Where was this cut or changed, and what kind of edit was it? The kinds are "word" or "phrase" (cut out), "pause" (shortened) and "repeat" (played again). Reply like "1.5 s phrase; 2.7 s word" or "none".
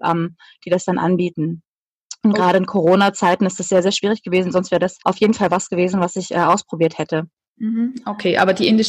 5.0 s pause